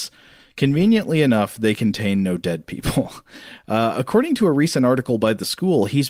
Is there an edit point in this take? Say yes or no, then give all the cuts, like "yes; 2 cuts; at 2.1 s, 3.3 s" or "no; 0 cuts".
no; 0 cuts